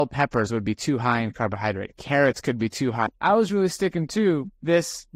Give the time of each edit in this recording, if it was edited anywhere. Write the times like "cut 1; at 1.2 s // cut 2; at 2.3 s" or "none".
none